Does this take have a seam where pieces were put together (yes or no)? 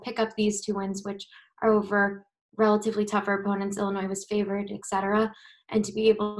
no